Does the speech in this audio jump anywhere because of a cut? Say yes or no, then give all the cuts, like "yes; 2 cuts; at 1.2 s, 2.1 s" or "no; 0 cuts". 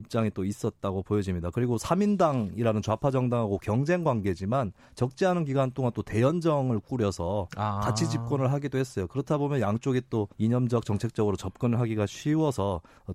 yes; 1 cut; at 10.3 s